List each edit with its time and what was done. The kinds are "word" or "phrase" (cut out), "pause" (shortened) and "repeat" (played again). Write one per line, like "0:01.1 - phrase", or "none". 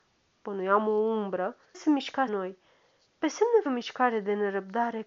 0:01.7 - word
0:02.3 - word
0:03.7 - word